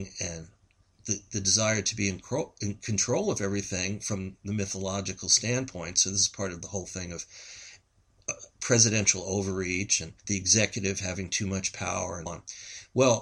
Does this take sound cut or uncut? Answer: cut